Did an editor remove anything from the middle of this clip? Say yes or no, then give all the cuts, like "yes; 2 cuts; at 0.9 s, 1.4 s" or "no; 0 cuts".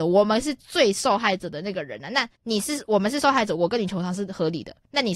yes; 1 cut; at 2.4 s